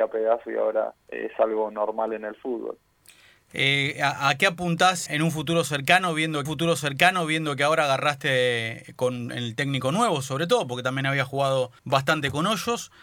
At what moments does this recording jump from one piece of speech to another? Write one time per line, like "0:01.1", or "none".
0:01.0
0:05.1
0:06.5
0:11.8